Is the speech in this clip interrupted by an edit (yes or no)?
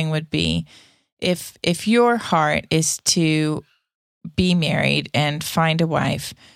no